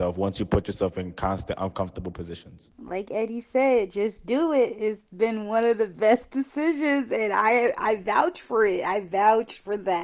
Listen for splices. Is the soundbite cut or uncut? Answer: uncut